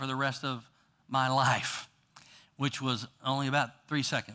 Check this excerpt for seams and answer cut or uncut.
uncut